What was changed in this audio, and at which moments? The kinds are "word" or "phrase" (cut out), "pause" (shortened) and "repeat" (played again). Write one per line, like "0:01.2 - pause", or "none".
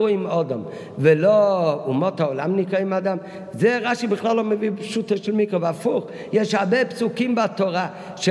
none